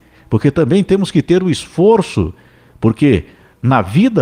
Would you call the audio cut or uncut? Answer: uncut